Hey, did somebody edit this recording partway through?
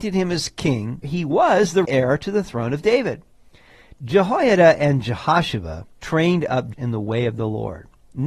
yes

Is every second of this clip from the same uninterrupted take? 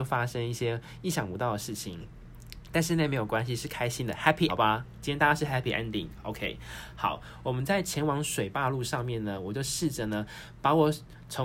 no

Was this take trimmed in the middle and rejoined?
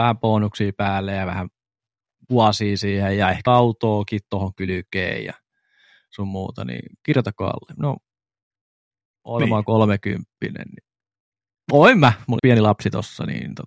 yes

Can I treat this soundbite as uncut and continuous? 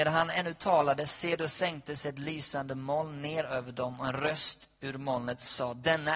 yes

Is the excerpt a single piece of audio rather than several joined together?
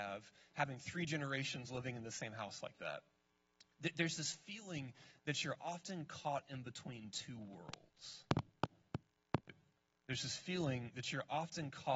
yes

